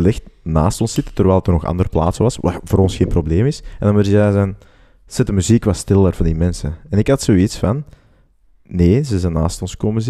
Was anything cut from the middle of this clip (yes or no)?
no